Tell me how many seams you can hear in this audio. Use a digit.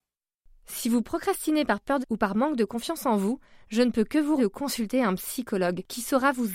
2